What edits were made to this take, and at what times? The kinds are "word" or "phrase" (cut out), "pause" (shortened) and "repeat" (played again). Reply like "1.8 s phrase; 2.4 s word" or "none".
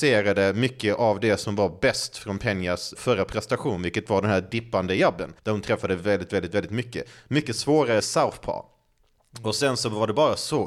2.9 s word; 5.4 s pause; 8.0 s phrase